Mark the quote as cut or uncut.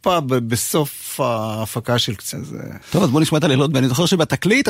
cut